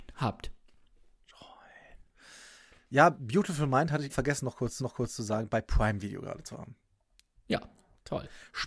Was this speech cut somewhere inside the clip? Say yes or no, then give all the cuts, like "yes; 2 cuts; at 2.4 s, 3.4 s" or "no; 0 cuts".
yes; 2 cuts; at 4.1 s, 4.8 s